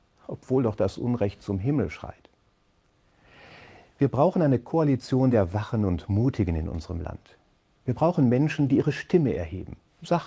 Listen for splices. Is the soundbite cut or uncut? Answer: uncut